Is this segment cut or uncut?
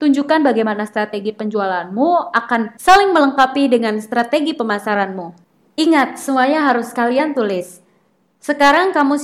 uncut